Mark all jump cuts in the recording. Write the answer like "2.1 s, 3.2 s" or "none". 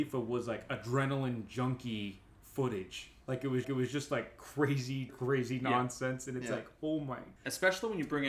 3.2 s, 3.6 s, 5.1 s, 7.4 s